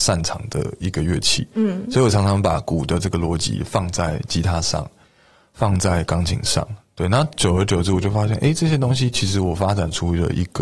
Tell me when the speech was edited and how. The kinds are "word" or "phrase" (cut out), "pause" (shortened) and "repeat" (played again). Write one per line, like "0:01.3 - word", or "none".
none